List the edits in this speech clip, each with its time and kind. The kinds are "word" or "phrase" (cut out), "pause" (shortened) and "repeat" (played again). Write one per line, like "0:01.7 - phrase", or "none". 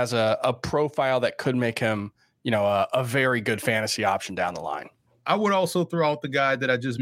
0:05.1 - pause